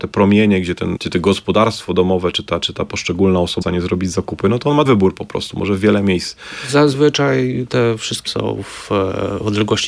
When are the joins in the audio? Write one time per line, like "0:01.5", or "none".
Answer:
0:01.0
0:03.6
0:04.8
0:08.3